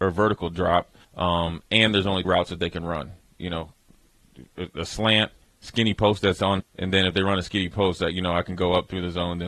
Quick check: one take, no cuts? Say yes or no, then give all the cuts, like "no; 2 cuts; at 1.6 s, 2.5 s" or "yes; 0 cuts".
no; 4 cuts; at 1.0 s, 2.2 s, 5.4 s, 6.6 s